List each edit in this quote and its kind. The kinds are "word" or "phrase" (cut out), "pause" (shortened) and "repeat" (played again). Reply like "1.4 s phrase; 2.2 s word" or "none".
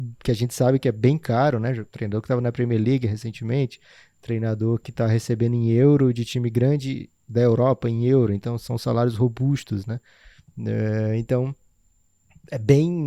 none